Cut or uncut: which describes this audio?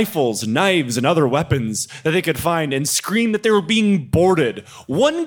uncut